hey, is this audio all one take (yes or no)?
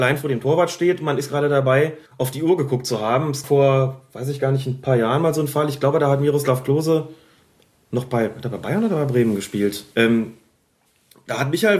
no